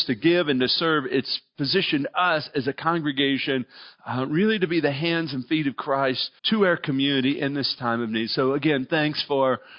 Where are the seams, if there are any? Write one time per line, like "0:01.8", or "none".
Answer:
0:06.4

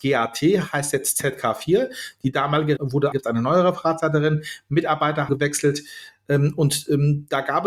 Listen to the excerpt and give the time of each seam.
0:02.8
0:03.1
0:05.3

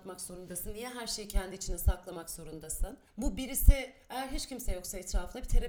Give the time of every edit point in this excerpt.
0:03.1

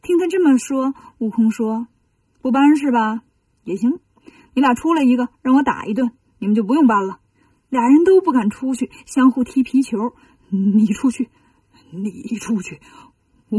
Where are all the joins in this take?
0:05.3
0:07.3

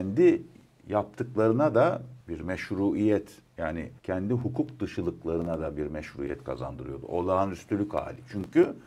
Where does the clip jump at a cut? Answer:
0:02.2
0:04.0

